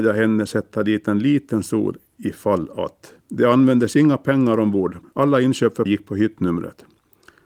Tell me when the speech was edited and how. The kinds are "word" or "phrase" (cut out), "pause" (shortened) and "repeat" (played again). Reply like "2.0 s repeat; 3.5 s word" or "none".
3.2 s pause; 5.0 s word; 5.9 s word